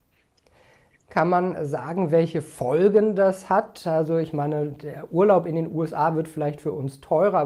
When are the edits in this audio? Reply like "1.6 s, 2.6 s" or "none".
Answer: none